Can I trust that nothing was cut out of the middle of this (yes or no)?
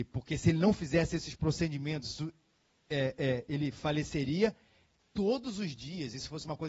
yes